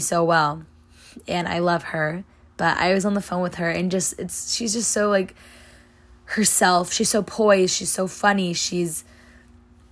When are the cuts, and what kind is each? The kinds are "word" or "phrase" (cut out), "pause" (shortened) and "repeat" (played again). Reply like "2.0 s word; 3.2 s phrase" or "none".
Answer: none